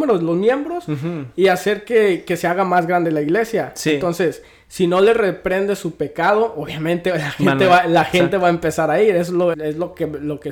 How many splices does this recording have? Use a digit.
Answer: 1